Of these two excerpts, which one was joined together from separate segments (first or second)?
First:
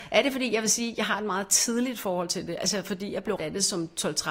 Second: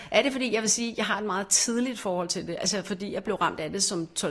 first